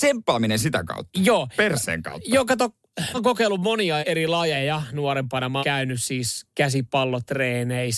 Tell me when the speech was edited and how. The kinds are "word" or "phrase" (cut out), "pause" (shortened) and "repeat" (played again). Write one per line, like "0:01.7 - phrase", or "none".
0:03.1 - word
0:04.0 - word
0:05.6 - word